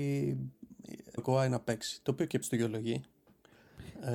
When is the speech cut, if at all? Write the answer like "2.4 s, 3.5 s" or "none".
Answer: 1.2 s, 2.4 s